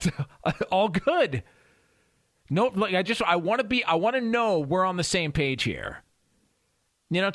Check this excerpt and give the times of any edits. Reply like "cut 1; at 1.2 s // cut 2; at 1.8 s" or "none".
none